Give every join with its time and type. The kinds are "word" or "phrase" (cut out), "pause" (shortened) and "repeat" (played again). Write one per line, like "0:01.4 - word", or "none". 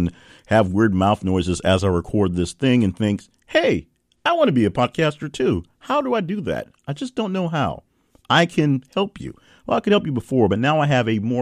none